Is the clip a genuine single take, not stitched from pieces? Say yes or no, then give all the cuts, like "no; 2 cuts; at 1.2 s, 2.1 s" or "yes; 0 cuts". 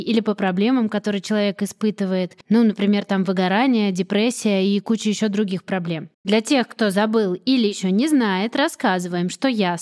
no; 2 cuts; at 2.4 s, 6.1 s